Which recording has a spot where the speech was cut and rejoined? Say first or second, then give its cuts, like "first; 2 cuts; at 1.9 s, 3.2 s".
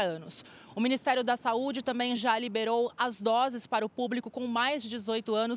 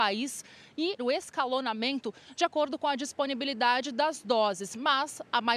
second; 1 cut; at 1.0 s